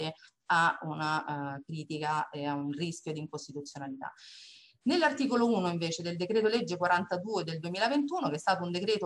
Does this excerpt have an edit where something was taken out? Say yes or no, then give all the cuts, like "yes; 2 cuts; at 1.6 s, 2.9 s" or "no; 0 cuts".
no; 0 cuts